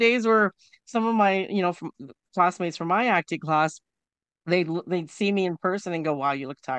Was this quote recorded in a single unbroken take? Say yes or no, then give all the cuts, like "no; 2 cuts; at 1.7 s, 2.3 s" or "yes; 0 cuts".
yes; 0 cuts